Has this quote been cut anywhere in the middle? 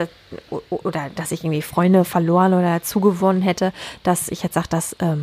no; 0 cuts

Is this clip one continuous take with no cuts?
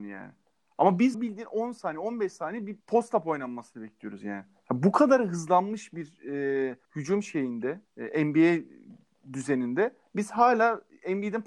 no; 4 cuts; at 1.1 s, 2.8 s, 6.8 s, 7.9 s

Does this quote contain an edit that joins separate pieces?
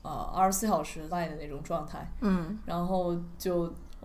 yes; 1 cut; at 1.1 s

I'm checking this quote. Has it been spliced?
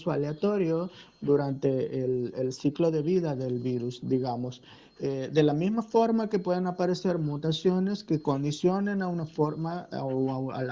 no; 0 cuts

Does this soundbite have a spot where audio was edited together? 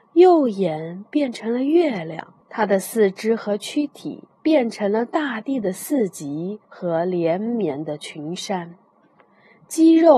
yes; 3 cuts; at 2.4 s, 4.3 s, 6.6 s

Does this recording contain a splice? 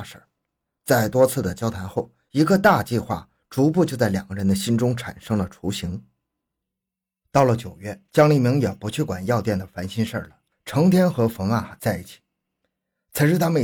no; 0 cuts

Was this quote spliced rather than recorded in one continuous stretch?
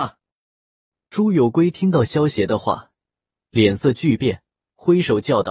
no; 0 cuts

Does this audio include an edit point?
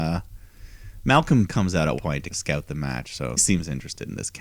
yes; 4 cuts; at 1.5 s, 2.0 s, 2.3 s, 3.4 s

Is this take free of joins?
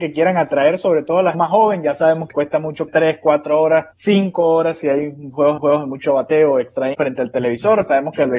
no; 6 cuts; at 1.3 s, 2.3 s, 2.9 s, 3.9 s, 5.6 s, 6.9 s

